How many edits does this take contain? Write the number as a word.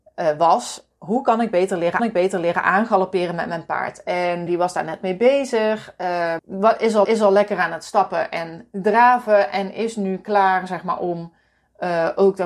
four